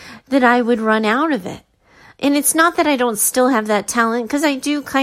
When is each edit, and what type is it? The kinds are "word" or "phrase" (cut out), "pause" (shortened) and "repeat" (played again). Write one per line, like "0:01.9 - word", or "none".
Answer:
none